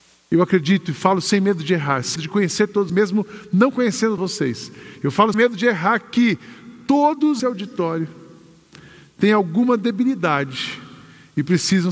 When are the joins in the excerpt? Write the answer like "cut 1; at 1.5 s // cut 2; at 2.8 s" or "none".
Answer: cut 1; at 2.2 s // cut 2; at 2.9 s // cut 3; at 4.2 s // cut 4; at 5.3 s // cut 5; at 7.4 s